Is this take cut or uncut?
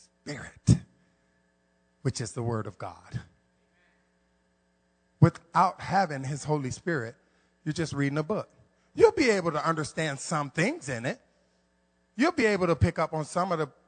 uncut